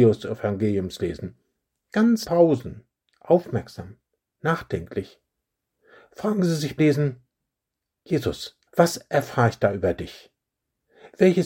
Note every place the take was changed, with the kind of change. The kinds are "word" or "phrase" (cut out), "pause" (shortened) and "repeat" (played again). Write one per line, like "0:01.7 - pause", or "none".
0:02.2 - phrase
0:06.8 - word
0:08.7 - pause